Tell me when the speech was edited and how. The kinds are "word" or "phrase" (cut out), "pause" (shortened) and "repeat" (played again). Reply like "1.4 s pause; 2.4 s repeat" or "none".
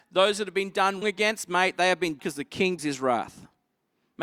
1.0 s word; 2.2 s word; 2.8 s word